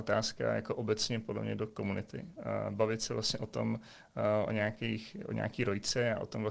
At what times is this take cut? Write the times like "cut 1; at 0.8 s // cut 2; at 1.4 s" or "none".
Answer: none